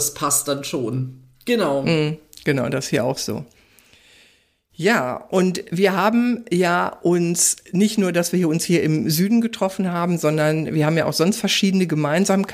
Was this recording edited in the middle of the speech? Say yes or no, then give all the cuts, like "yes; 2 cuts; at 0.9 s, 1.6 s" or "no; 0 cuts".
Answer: no; 0 cuts